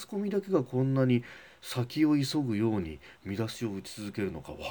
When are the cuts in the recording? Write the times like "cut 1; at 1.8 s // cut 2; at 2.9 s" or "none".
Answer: none

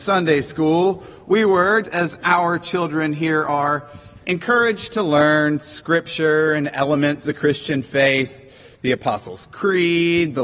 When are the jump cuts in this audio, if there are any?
cut 1; at 1.8 s // cut 2; at 7.2 s

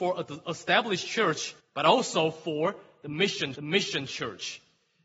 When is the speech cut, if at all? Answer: cut 1; at 1.6 s // cut 2; at 3.5 s

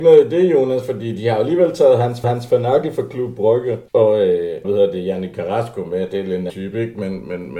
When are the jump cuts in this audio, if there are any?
cut 1; at 2.2 s // cut 2; at 3.9 s // cut 3; at 4.6 s // cut 4; at 6.5 s

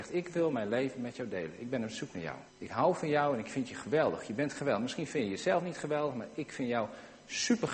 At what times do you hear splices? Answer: cut 1; at 2.5 s

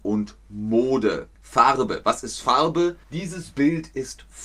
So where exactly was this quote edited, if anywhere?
cut 1; at 1.3 s // cut 2; at 3.0 s

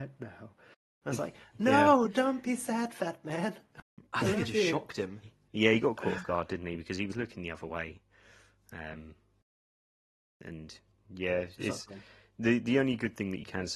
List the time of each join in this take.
none

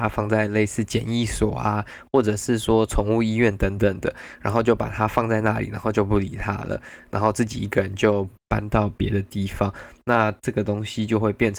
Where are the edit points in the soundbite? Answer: cut 1; at 8.4 s

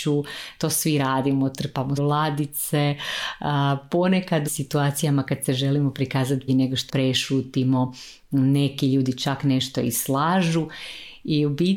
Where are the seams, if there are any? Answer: cut 1; at 2.0 s // cut 2; at 4.5 s // cut 3; at 6.5 s // cut 4; at 6.9 s

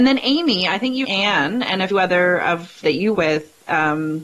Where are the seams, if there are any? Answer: cut 1; at 1.0 s // cut 2; at 1.9 s // cut 3; at 2.8 s // cut 4; at 3.1 s

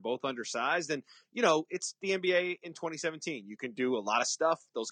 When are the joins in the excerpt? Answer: none

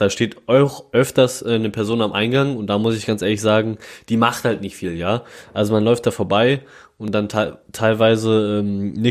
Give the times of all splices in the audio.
none

